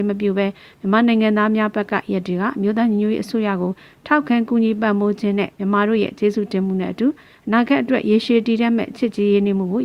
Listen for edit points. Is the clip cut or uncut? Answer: uncut